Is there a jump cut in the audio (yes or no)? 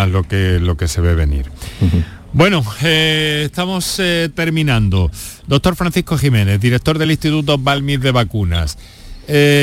no